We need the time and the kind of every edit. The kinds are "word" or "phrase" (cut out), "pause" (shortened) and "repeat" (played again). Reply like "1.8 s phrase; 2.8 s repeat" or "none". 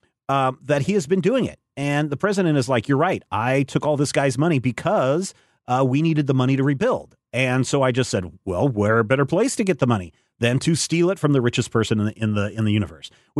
none